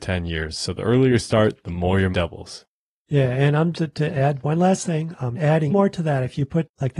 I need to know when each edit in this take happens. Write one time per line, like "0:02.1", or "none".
0:02.1
0:03.7
0:05.3
0:05.7